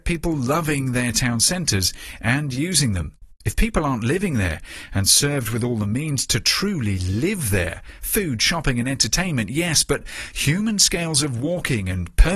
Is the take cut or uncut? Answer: cut